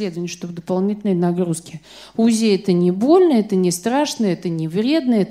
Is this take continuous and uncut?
yes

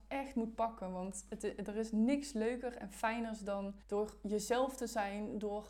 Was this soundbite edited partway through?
yes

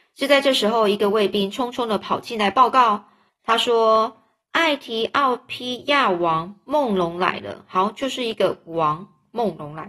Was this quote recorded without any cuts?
no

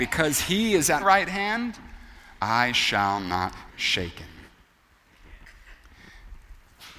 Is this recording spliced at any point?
yes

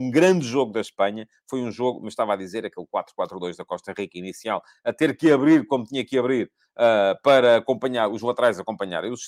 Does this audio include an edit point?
no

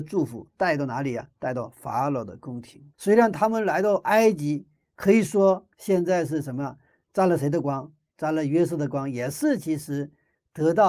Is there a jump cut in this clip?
yes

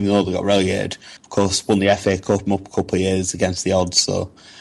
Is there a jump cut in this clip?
yes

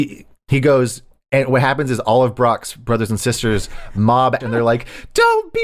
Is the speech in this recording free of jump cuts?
no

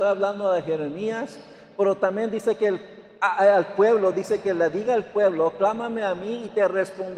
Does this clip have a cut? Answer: no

